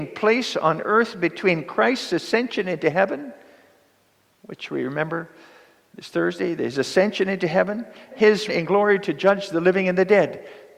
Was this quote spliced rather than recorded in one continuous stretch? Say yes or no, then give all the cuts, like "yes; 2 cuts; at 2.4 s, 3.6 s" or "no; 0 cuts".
yes; 2 cuts; at 8.1 s, 8.5 s